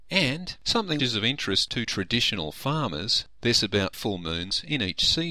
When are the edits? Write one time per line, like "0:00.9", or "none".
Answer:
0:01.0
0:03.9

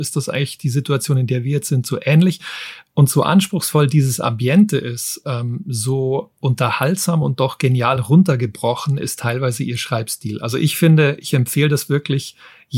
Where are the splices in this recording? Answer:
none

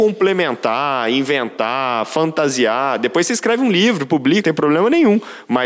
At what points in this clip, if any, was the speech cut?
0:04.4

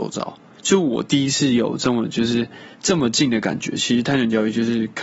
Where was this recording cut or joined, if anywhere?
0:02.7

